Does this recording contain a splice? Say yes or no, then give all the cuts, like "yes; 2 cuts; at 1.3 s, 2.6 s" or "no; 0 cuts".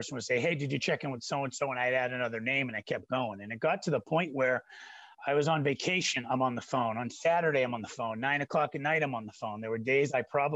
no; 0 cuts